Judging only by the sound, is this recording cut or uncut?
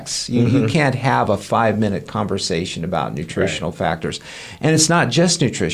uncut